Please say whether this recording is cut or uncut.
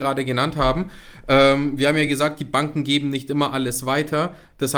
uncut